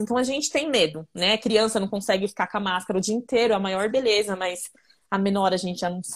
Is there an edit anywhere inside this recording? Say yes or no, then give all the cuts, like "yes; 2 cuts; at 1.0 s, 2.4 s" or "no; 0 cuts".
no; 0 cuts